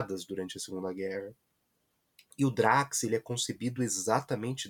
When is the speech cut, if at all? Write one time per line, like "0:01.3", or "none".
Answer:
none